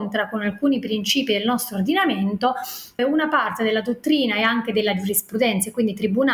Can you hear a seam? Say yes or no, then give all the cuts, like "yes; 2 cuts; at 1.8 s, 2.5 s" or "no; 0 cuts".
yes; 1 cut; at 3.0 s